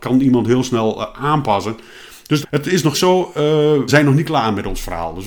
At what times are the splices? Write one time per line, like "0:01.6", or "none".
0:02.4
0:02.9
0:03.9

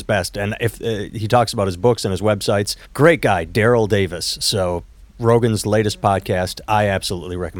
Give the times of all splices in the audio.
0:02.8

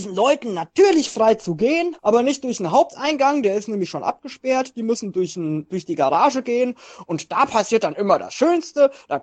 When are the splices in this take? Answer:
0:02.0

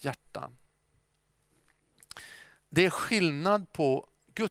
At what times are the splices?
0:02.6

